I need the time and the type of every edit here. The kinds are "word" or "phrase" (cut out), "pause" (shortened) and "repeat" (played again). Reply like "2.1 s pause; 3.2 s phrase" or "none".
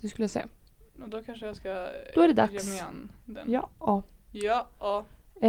none

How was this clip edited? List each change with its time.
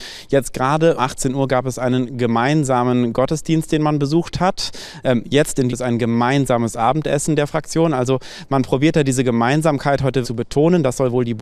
1.0 s word; 5.7 s phrase; 10.2 s word

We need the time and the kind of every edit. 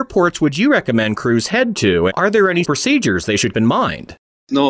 2.1 s word; 2.6 s word; 3.5 s word

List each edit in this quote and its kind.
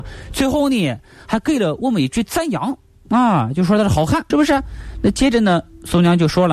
4.3 s word

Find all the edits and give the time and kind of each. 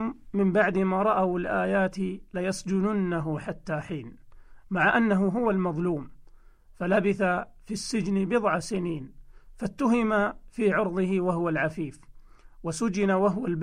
none

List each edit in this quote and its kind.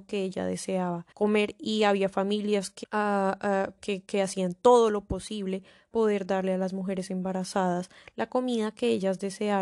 1.1 s pause; 2.8 s word; 3.8 s word; 5.9 s word

